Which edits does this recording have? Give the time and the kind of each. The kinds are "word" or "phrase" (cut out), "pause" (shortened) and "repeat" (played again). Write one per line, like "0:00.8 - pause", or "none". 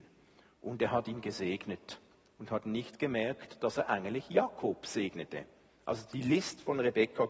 none